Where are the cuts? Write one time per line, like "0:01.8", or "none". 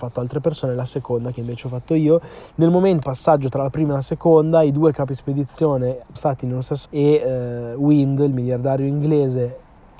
0:03.0
0:06.2
0:06.9